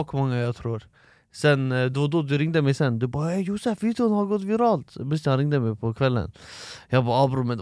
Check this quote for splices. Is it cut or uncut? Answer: uncut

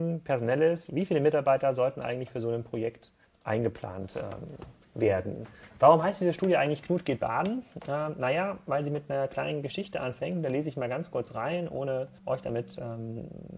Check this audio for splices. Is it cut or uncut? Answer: cut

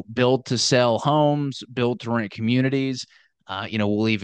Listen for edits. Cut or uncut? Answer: uncut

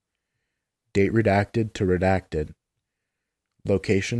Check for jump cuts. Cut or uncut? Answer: uncut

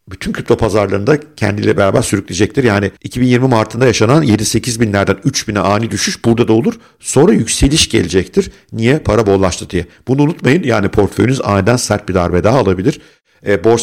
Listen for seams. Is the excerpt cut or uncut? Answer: cut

